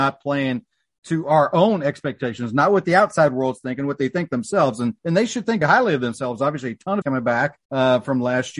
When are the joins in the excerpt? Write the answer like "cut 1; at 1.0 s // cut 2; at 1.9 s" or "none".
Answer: cut 1; at 5.0 s // cut 2; at 5.6 s // cut 3; at 7.0 s // cut 4; at 7.6 s